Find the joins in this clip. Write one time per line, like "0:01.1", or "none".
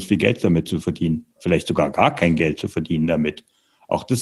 0:01.4